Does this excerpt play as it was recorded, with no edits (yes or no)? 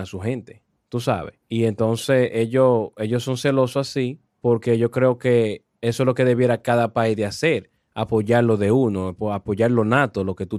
no